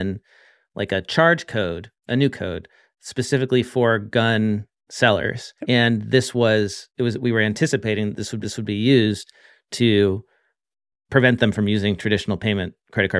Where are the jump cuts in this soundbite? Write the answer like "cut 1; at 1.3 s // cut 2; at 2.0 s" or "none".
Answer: cut 1; at 2.0 s // cut 2; at 2.3 s // cut 3; at 5.6 s // cut 4; at 8.4 s // cut 5; at 10.9 s